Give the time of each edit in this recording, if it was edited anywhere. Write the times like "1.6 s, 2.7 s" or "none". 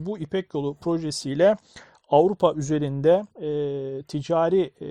3.3 s